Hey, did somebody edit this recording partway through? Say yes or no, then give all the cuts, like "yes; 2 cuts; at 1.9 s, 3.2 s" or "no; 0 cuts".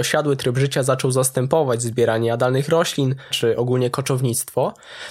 yes; 1 cut; at 3.3 s